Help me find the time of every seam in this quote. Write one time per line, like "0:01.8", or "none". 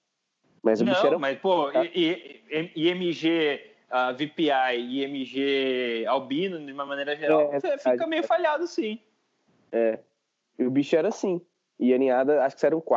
none

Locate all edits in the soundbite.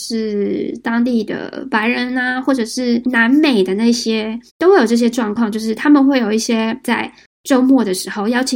0:04.5
0:06.8

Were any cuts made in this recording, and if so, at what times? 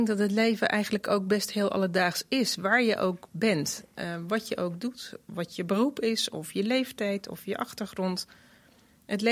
none

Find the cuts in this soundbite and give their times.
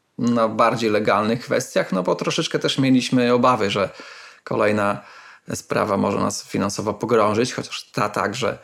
none

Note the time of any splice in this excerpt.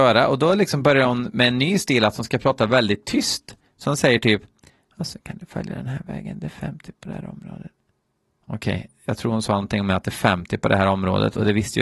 none

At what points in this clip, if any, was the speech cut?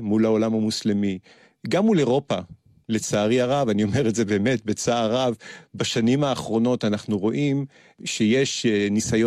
none

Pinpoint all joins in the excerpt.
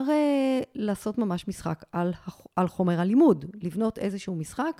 none

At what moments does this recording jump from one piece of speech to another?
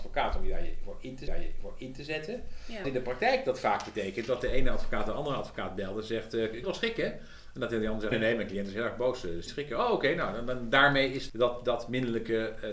0:01.3
0:02.8
0:06.6
0:08.1
0:09.5
0:11.3

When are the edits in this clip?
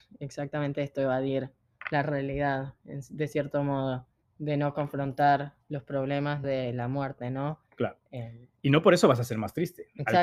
0:04.2
0:06.4

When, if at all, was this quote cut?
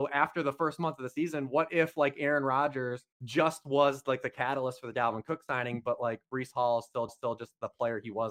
0:03.1
0:07.1

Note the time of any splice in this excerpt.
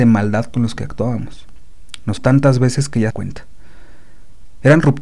0:02.2
0:03.1

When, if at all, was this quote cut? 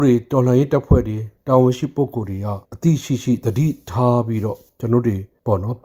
0:02.6

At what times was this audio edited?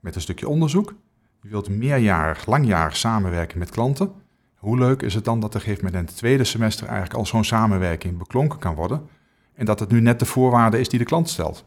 none

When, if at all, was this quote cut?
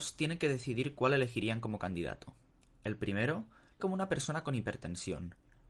0:02.6
0:03.8

